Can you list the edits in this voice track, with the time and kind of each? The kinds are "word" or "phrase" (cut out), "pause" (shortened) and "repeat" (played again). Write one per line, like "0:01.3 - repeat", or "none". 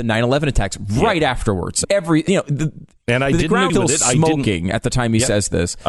0:01.8 - phrase
0:02.3 - phrase
0:03.7 - word